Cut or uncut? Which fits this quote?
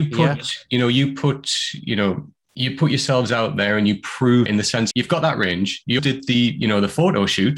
cut